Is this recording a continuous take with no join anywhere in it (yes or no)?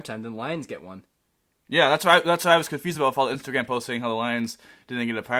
yes